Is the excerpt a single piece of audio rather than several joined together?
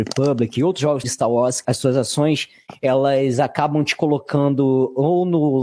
no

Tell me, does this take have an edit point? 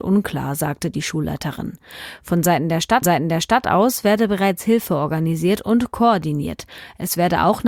yes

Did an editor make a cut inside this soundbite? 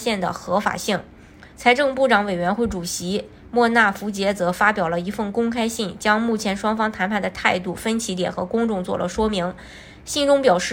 yes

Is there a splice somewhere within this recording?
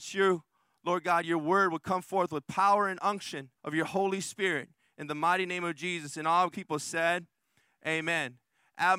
yes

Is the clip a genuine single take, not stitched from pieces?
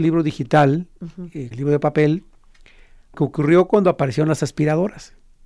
no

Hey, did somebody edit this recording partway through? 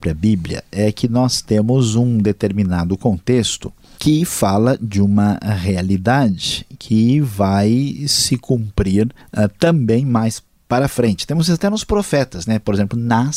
no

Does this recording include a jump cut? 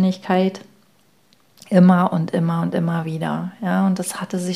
no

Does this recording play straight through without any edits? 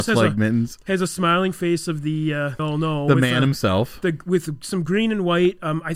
no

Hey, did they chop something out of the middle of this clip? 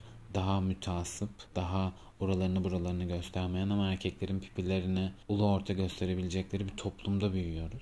yes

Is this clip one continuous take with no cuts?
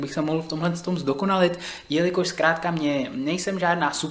yes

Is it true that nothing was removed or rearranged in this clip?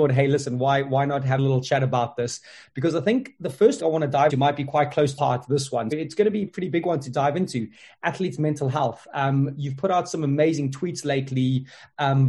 no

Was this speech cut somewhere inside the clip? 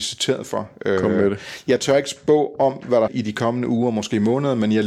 yes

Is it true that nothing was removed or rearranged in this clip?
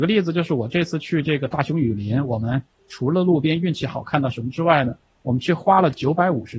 yes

